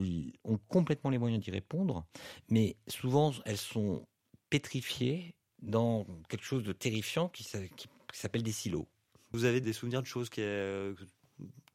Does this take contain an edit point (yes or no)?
yes